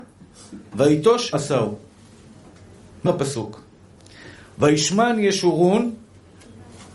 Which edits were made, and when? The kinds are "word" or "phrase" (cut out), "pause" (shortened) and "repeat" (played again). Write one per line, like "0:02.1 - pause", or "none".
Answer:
0:01.3 - word
0:03.1 - word